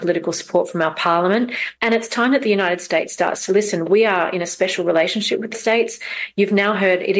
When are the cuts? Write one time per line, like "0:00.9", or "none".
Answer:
0:01.8
0:05.5